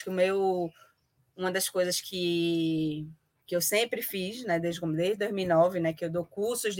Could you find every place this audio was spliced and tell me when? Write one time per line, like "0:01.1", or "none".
none